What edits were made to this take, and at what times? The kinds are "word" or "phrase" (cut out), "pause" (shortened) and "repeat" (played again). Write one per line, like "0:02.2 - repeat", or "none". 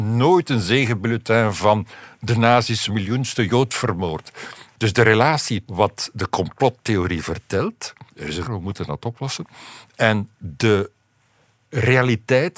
0:02.9 - phrase
0:05.7 - word
0:08.1 - pause
0:08.4 - word